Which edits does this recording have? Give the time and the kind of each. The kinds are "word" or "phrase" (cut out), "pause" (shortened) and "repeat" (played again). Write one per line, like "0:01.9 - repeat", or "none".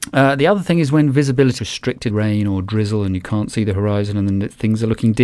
0:01.6 - word
0:02.1 - phrase